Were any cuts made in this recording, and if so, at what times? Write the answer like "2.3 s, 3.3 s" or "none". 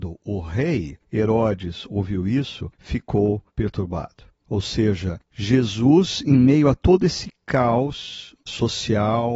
3.5 s, 8.5 s